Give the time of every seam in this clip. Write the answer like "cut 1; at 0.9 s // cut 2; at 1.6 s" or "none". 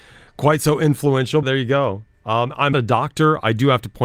cut 1; at 1.4 s // cut 2; at 2.7 s